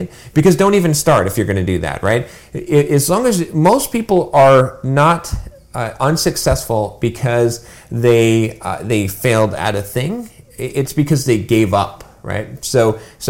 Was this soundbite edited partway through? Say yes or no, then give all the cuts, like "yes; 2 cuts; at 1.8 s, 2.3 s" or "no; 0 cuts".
no; 0 cuts